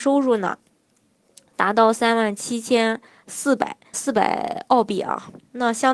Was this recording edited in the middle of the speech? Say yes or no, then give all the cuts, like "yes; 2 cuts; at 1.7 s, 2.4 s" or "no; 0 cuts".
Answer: yes; 1 cut; at 3.9 s